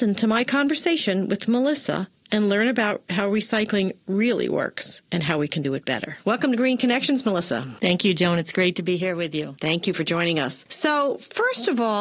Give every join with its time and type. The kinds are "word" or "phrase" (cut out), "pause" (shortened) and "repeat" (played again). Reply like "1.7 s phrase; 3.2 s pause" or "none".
6.2 s pause